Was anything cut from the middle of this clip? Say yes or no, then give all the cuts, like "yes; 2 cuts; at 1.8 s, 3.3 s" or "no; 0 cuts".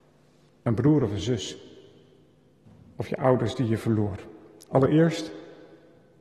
no; 0 cuts